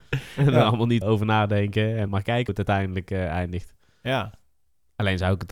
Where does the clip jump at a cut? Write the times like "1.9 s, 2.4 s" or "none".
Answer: 1.0 s, 2.1 s, 2.5 s